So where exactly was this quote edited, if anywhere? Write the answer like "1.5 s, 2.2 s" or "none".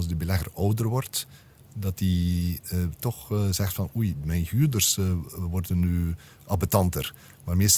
none

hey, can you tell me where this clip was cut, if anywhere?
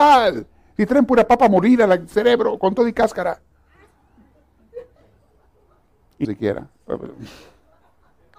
6.2 s

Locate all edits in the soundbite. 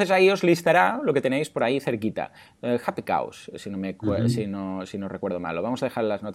none

